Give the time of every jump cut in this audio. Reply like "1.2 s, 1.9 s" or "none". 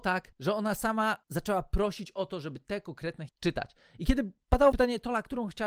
3.3 s, 4.7 s